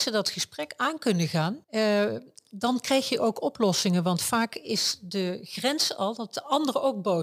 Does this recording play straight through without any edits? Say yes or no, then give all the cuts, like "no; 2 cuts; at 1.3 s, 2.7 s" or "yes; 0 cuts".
no; 1 cut; at 1.6 s